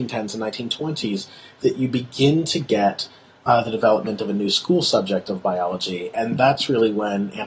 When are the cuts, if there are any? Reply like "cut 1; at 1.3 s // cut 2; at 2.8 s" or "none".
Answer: none